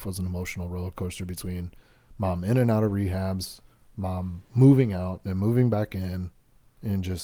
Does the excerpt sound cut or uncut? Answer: uncut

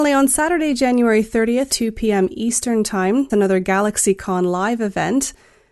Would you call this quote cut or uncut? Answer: cut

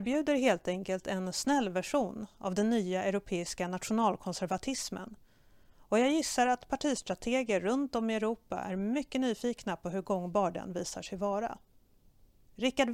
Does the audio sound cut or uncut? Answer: uncut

